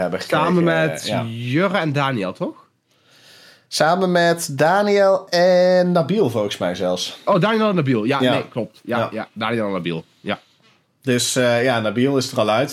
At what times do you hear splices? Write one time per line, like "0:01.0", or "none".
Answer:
none